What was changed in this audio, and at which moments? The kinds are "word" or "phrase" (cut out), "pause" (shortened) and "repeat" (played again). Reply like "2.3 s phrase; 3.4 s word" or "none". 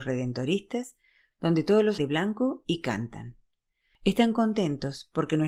2.0 s phrase